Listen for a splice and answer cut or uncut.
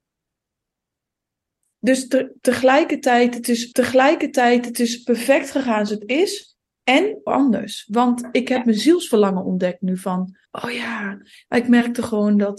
cut